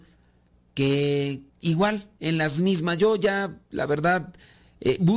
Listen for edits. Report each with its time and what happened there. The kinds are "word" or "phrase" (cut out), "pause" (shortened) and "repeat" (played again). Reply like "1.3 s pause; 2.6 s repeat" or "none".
1.5 s pause; 3.6 s pause